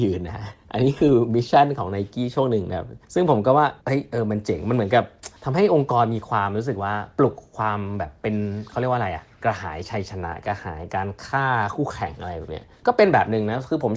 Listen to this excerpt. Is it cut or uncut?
cut